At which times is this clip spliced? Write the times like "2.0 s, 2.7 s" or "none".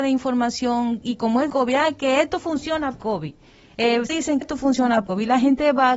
1.5 s, 2.9 s, 4.1 s, 4.4 s, 5.1 s